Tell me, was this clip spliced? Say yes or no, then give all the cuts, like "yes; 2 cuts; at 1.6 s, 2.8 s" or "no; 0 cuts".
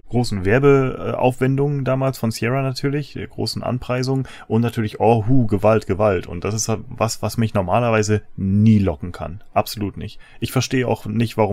no; 0 cuts